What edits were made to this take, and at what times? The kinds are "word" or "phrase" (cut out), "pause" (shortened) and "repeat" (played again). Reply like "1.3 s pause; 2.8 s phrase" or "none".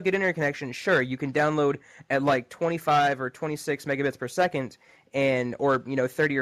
none